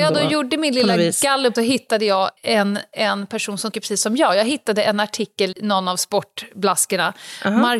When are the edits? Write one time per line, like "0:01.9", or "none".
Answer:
0:01.6
0:02.4
0:03.7
0:05.5